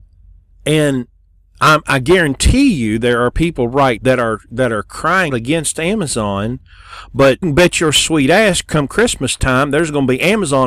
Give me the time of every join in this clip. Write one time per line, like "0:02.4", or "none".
0:04.0
0:05.3
0:07.4